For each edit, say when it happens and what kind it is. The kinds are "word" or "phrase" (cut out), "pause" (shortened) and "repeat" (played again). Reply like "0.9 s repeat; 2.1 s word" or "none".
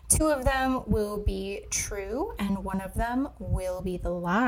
none